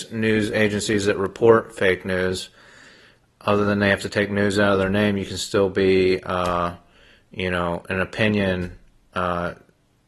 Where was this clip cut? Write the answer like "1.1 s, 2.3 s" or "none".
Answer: none